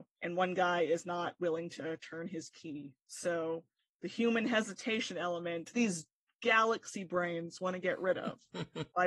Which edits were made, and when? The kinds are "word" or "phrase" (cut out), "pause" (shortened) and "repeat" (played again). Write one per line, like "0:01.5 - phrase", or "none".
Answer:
0:05.7 - word